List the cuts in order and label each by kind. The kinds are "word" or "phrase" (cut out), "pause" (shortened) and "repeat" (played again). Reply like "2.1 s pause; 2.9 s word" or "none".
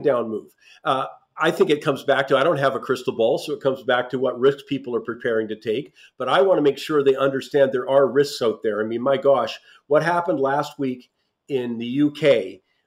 none